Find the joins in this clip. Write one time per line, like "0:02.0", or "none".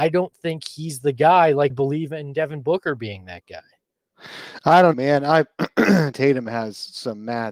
0:01.7
0:04.9
0:06.1